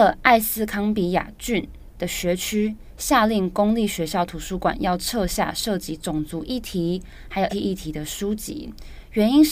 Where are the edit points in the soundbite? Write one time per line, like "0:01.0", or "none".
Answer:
0:07.5